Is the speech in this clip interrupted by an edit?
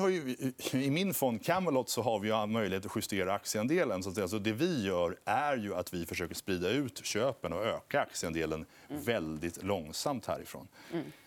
no; 0 cuts

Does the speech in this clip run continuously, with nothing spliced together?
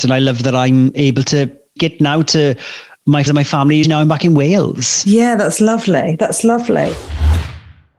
no; 3 cuts; at 1.8 s, 3.3 s, 3.8 s

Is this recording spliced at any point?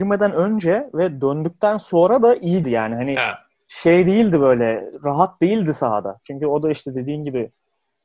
yes; 1 cut; at 2.6 s

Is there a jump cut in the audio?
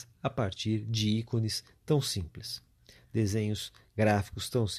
no; 0 cuts

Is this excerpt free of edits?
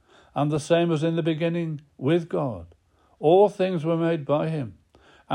yes; 0 cuts

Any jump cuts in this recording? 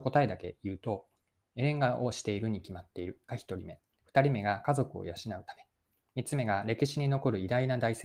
no; 0 cuts

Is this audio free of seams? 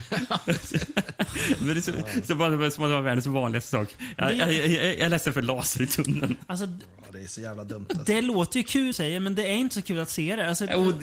no; 1 cut; at 8.9 s

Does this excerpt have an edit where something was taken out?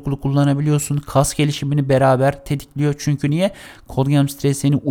no; 0 cuts

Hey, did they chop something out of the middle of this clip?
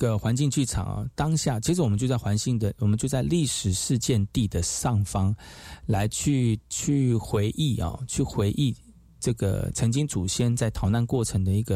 yes; 1 cut; at 6.7 s

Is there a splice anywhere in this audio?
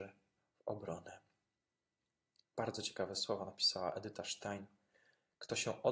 no; 0 cuts

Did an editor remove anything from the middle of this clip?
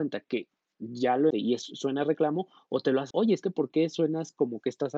yes; 2 cuts; at 1.3 s, 3.1 s

